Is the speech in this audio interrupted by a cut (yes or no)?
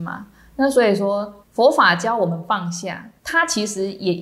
yes